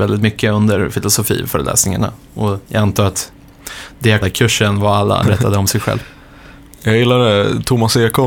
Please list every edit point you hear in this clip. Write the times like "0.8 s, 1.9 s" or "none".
4.2 s, 5.2 s